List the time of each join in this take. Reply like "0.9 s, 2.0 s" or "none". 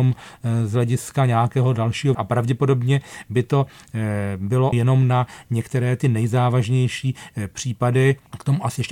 2.1 s, 4.7 s